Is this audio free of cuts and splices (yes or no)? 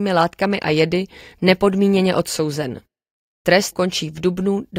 no